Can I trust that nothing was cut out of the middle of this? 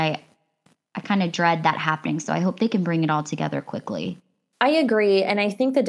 yes; 0 cuts

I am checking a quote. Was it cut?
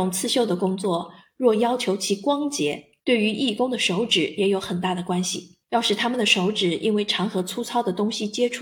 yes; 2 cuts; at 3.0 s, 5.6 s

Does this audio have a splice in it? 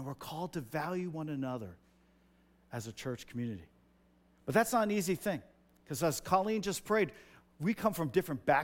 no; 0 cuts

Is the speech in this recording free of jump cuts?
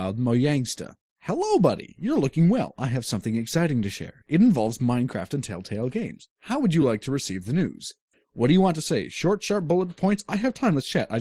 yes; 0 cuts

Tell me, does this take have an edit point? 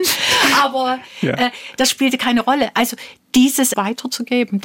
yes; 1 cut; at 3.7 s

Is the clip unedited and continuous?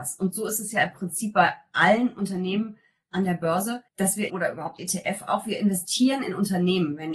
no; 3 cuts; at 3.9 s, 4.3 s, 4.8 s

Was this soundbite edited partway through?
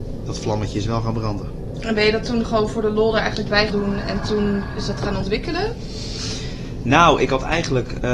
yes; 1 cut; at 3.7 s

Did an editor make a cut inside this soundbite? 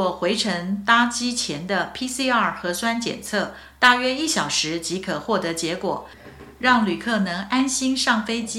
no; 0 cuts

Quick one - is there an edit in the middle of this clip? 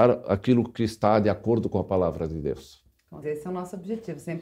yes; 1 cut; at 3.2 s

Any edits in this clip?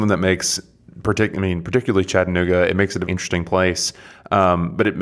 yes; 1 cut; at 3.1 s

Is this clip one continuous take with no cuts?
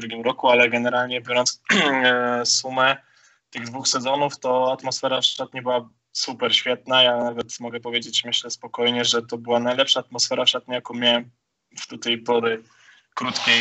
yes; 0 cuts

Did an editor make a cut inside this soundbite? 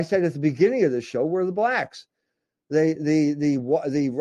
no; 0 cuts

